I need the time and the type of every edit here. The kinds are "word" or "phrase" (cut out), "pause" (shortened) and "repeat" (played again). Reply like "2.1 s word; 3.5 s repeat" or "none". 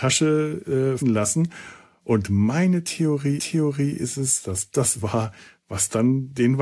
1.0 s word; 3.4 s repeat; 4.7 s word